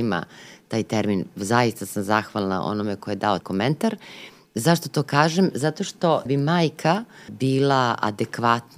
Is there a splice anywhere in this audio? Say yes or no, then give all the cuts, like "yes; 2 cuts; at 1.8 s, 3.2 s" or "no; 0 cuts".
yes; 3 cuts; at 3.4 s, 6.3 s, 7.3 s